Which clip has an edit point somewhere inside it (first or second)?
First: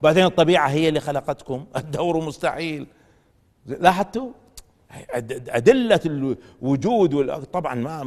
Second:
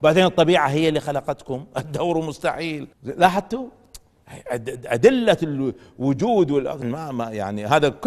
second